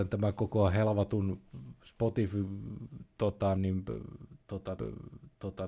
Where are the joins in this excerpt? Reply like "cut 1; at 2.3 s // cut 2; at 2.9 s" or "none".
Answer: cut 1; at 3.6 s // cut 2; at 4.8 s